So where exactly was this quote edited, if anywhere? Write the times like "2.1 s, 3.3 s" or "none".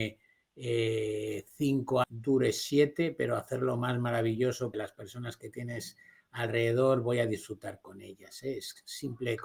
2.0 s, 4.7 s